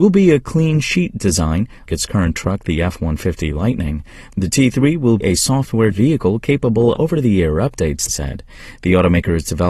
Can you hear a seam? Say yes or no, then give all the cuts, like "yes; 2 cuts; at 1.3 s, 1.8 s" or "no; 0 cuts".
yes; 6 cuts; at 1.9 s, 2.3 s, 5.2 s, 5.9 s, 7.0 s, 8.1 s